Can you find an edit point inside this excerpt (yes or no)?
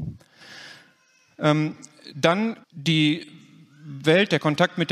yes